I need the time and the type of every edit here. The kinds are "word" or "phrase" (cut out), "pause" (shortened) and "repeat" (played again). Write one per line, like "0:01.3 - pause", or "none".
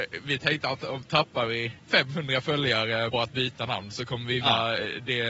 0:01.8 - pause
0:03.1 - word
0:04.4 - word

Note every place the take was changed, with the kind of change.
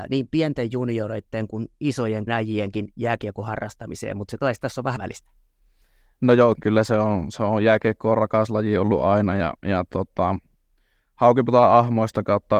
0:02.3 - word
0:05.0 - phrase
0:06.5 - word
0:09.6 - pause

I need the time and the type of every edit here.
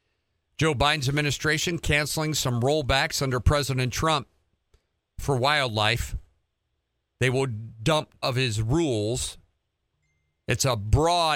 0:08.2 - word

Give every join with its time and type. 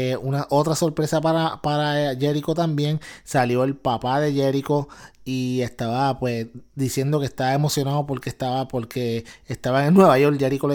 0:06.7 - pause

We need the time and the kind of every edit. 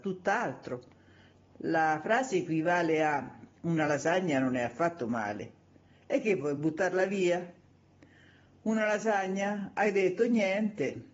none

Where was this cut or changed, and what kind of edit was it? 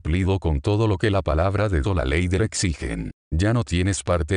0:01.8 - word
0:02.4 - word

